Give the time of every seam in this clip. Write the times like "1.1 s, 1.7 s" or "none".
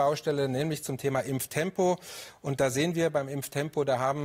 1.0 s

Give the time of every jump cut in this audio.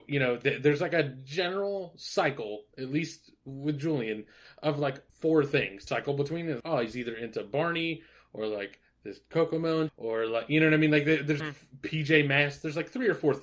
5.1 s, 5.9 s, 6.6 s, 9.9 s, 11.4 s

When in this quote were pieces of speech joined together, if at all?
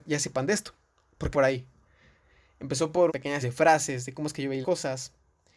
1.3 s, 3.1 s, 3.4 s, 4.6 s

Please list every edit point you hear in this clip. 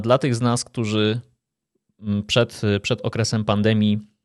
none

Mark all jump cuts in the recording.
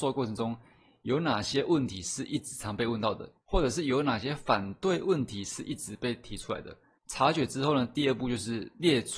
3.4 s, 7.0 s

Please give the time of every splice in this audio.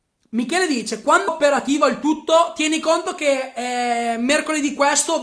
1.3 s

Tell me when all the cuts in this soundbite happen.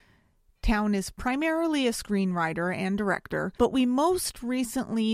3.6 s

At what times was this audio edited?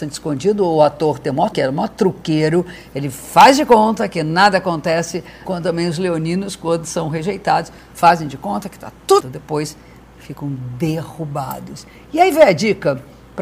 1.5 s, 5.5 s, 9.2 s

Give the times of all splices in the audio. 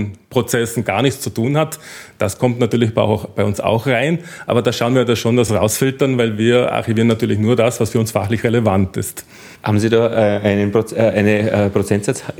5.5 s, 9.6 s

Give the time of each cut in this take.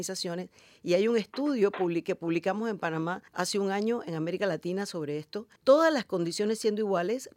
3.3 s, 5.6 s

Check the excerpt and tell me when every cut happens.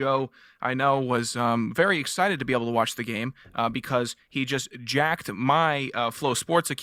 none

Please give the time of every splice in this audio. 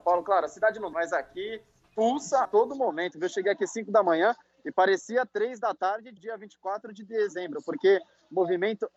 0.9 s, 2.4 s, 6.2 s

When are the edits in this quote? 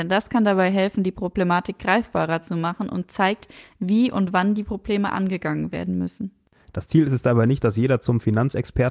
none

